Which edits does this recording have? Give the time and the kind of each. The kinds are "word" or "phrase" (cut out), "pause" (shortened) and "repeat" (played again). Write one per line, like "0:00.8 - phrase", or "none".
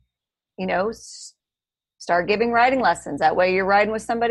none